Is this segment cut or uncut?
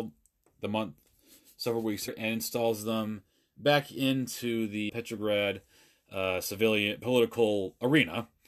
cut